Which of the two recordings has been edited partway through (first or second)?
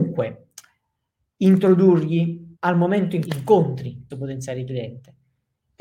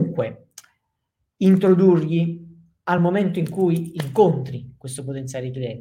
first